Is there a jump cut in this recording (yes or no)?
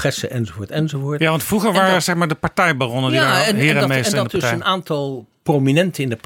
no